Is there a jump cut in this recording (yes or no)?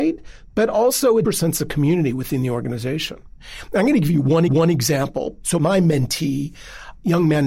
yes